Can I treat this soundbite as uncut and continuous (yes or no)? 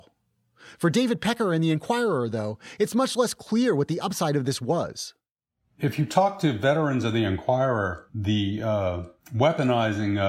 yes